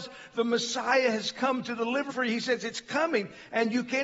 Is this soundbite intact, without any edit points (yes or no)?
no